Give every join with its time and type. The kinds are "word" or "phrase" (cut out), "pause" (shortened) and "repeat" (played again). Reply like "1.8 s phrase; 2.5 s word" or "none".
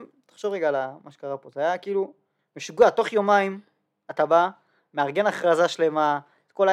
none